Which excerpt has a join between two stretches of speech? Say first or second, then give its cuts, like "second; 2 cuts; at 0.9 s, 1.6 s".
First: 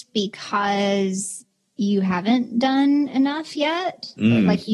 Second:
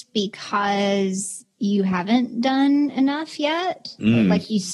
second; 1 cut; at 1.5 s